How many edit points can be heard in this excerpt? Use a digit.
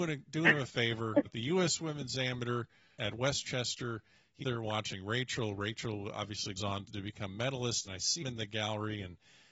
7